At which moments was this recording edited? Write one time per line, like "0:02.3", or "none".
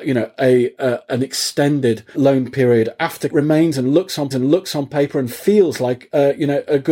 0:02.1
0:03.3
0:04.3